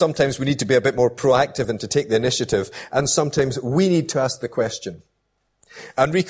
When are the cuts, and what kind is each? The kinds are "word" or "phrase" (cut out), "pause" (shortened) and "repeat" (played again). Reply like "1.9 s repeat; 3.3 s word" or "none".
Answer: none